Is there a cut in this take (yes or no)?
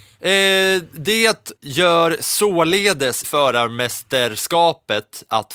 yes